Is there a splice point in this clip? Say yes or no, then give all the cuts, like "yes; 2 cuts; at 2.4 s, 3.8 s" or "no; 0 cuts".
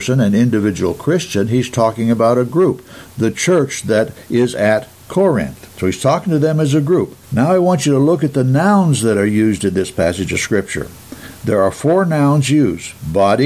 yes; 2 cuts; at 5.7 s, 7.2 s